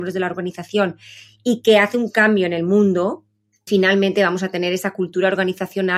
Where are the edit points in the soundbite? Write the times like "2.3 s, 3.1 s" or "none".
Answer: 3.7 s